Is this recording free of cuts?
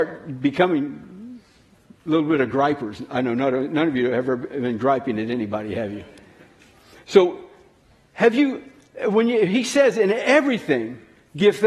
yes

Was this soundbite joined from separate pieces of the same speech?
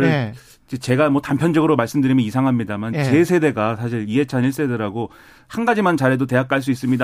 no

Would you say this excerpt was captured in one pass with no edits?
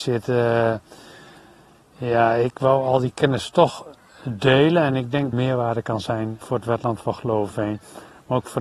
no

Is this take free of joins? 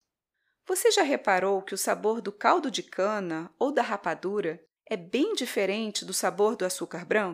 yes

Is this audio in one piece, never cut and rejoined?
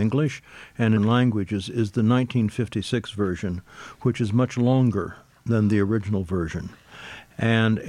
no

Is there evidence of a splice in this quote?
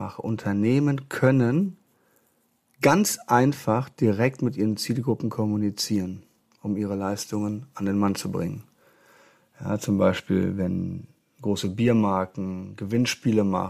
no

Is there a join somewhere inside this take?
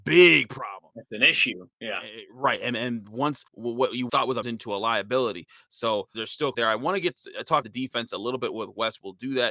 yes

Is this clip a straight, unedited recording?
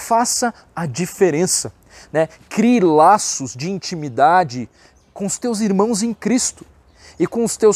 yes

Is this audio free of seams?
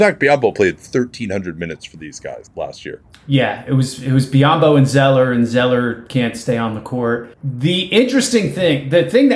yes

